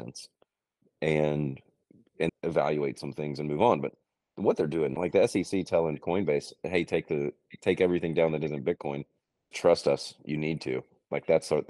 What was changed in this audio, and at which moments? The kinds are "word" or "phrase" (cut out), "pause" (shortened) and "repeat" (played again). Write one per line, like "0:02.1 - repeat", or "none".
0:02.3 - word
0:05.0 - word
0:09.5 - word

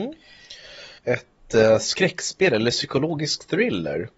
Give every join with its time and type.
0:01.0 - pause

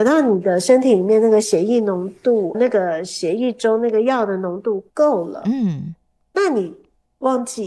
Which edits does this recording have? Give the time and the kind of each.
0:02.5 - word
0:04.9 - pause

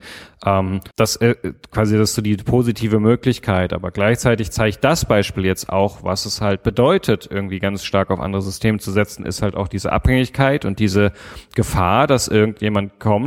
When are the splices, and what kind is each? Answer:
0:00.9 - pause

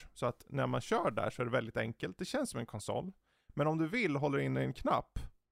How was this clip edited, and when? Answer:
none

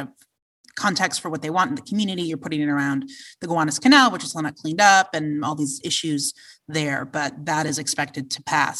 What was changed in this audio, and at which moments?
none

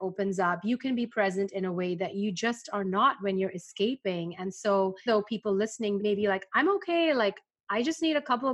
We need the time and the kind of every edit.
0:05.1 - word
0:06.0 - word

